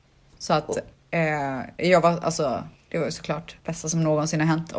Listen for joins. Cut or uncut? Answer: cut